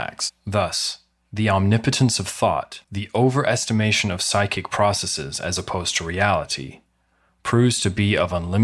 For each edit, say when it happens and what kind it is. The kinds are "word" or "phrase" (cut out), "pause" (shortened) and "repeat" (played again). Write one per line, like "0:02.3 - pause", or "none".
0:02.8 - pause